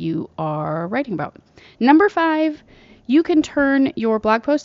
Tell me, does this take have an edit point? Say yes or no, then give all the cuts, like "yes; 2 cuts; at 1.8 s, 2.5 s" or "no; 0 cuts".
no; 0 cuts